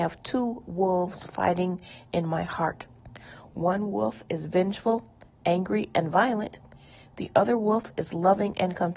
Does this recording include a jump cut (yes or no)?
no